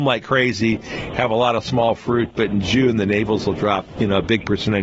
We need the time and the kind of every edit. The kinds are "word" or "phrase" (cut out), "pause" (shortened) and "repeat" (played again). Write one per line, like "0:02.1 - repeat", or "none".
none